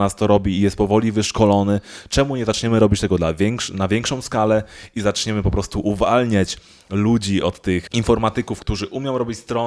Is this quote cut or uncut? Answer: uncut